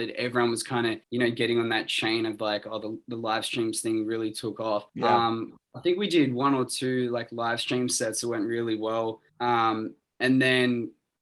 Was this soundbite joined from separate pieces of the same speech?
yes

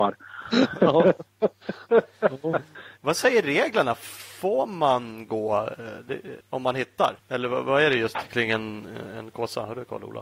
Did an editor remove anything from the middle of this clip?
yes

